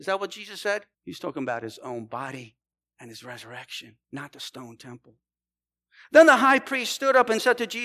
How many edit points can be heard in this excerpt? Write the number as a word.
three